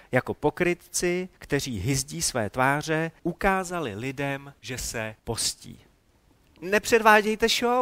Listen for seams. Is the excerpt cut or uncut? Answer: cut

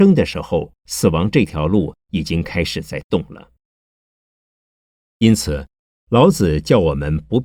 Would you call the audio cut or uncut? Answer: uncut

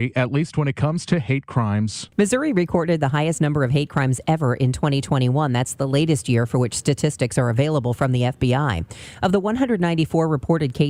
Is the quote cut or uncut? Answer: cut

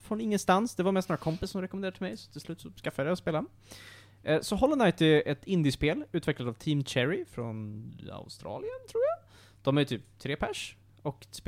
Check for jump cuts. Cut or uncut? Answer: uncut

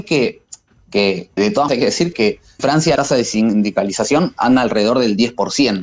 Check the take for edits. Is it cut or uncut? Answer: cut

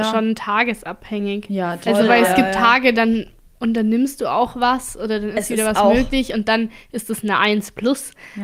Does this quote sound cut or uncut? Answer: uncut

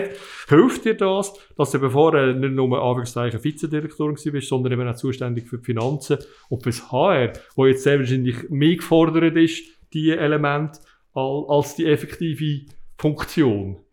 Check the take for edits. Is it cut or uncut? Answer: uncut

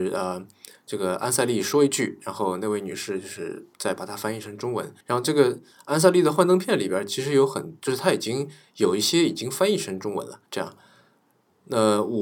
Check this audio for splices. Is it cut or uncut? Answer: cut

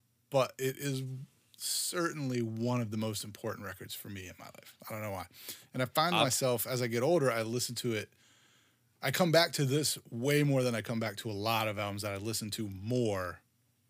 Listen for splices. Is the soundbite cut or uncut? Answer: cut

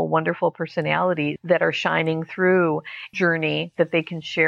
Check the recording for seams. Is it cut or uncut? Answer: cut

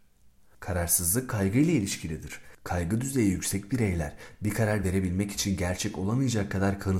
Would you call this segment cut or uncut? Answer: uncut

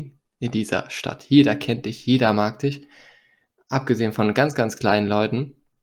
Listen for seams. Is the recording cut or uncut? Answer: uncut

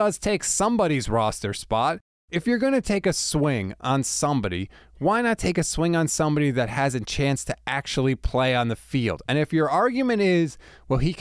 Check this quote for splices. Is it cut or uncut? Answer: uncut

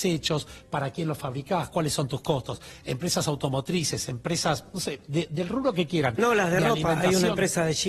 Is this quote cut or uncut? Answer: uncut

